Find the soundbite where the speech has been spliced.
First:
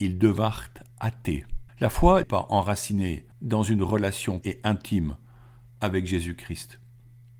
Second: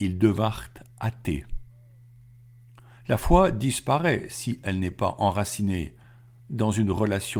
first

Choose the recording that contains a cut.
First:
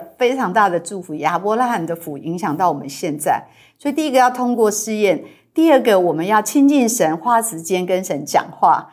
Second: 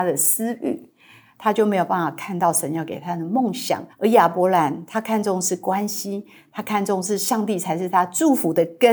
second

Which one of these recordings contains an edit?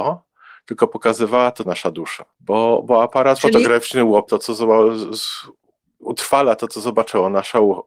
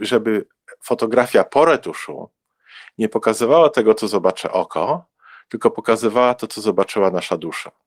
first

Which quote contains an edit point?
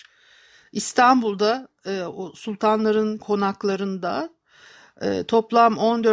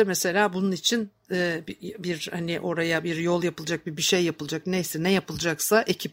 first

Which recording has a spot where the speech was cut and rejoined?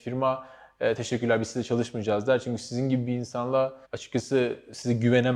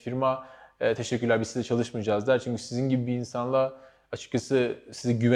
first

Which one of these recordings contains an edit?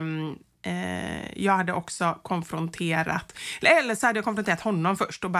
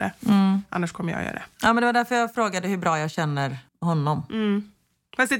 second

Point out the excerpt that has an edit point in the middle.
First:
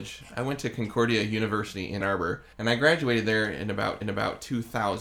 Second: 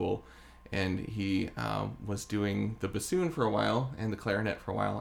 first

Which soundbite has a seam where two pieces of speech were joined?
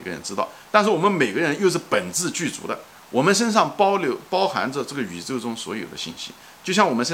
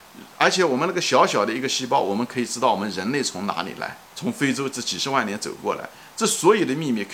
second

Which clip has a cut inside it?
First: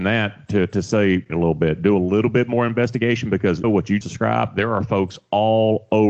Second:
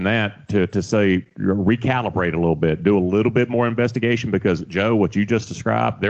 first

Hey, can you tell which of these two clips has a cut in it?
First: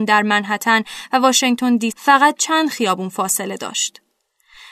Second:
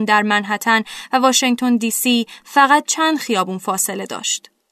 first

